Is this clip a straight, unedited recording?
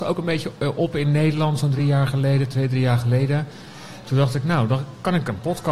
yes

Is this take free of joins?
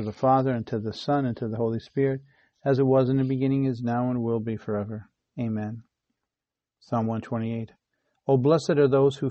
yes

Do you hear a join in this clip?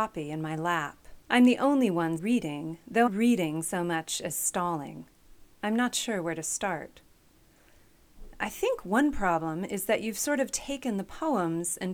yes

